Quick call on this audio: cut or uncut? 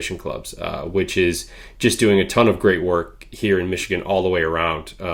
uncut